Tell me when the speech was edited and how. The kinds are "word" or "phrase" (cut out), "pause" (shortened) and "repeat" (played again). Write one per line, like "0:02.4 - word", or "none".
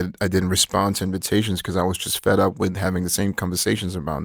none